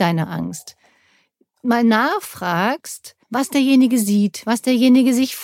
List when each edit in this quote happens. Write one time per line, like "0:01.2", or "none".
0:03.2